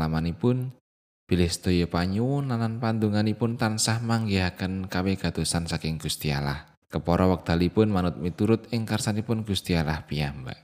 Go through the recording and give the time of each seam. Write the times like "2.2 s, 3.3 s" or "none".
6.8 s